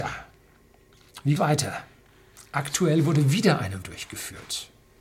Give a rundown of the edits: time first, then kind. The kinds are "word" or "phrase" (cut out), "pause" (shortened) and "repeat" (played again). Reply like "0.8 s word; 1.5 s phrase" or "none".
1.4 s phrase; 3.8 s word